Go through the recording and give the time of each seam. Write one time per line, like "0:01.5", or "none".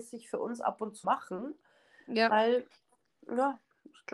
0:01.0